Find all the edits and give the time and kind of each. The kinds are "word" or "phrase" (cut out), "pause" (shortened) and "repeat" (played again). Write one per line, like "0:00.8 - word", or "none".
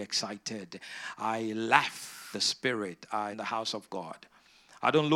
0:02.3 - word
0:03.3 - phrase